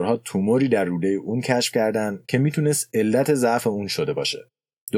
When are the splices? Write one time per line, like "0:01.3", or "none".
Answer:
none